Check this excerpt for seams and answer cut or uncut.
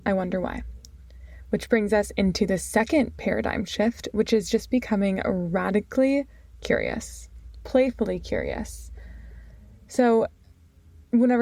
uncut